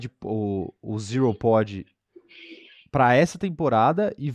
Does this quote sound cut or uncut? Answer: uncut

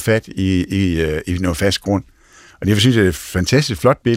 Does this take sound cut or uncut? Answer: uncut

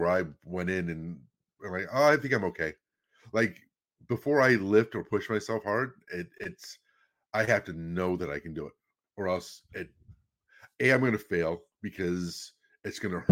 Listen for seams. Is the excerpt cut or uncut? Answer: uncut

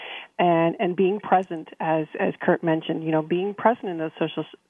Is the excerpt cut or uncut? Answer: uncut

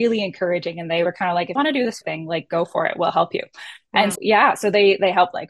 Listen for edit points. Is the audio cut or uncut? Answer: cut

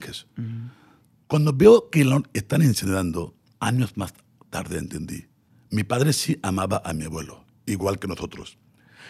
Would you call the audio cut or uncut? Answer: uncut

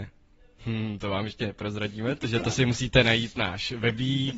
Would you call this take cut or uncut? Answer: uncut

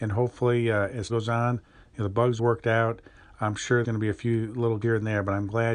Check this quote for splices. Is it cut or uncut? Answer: cut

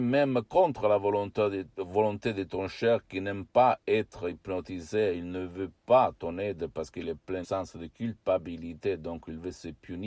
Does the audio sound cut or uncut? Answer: cut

